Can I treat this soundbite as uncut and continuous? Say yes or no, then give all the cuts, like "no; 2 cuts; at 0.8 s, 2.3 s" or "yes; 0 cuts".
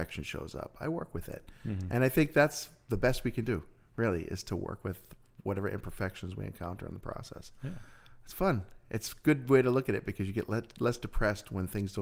yes; 0 cuts